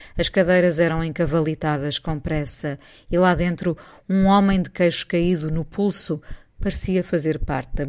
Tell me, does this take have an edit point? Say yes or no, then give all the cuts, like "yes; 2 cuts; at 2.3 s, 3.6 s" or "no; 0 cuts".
no; 0 cuts